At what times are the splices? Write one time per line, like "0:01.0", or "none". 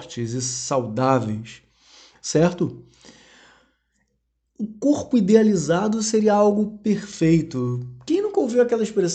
none